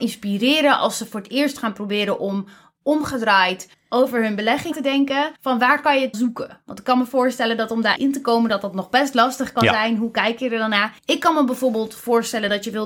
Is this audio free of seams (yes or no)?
no